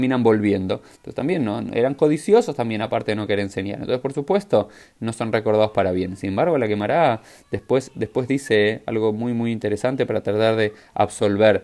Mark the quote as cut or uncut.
uncut